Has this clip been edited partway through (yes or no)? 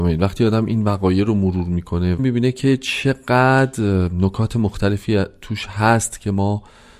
no